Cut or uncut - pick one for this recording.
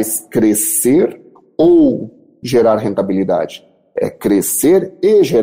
uncut